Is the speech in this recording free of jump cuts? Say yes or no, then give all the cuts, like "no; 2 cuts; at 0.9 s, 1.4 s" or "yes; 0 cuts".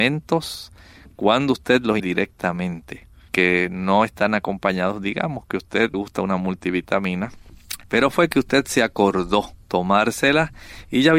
no; 5 cuts; at 2.0 s, 3.3 s, 5.9 s, 7.8 s, 9.6 s